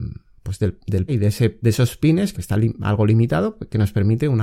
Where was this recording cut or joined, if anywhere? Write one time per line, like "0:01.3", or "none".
0:01.1
0:01.6
0:02.3